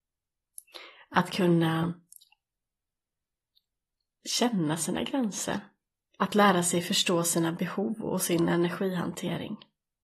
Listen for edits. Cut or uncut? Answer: uncut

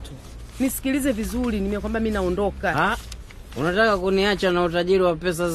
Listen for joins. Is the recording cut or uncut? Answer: uncut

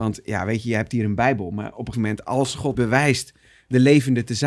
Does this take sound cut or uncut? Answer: cut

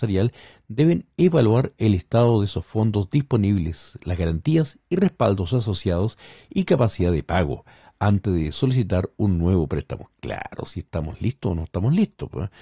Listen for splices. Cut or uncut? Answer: uncut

